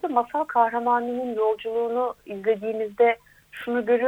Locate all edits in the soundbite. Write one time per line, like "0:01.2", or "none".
none